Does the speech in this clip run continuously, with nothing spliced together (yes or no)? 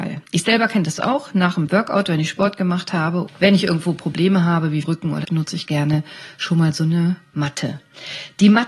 no